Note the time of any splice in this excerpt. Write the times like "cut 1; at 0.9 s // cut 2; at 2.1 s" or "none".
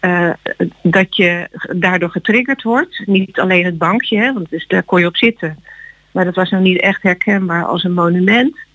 none